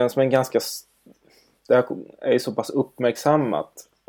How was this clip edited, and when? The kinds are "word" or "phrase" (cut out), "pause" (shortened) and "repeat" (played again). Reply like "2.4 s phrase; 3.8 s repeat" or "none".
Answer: none